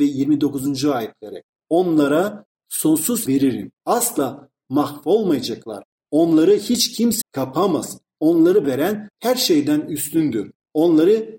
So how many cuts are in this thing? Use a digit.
5